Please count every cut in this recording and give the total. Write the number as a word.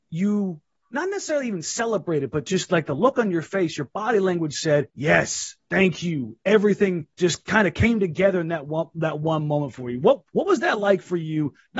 three